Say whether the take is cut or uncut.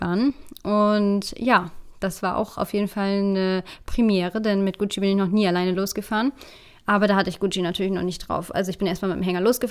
uncut